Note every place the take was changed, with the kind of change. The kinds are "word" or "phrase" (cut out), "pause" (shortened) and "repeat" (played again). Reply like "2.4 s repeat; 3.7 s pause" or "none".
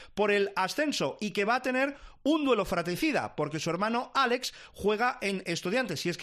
none